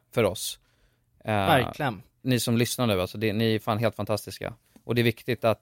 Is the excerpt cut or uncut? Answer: uncut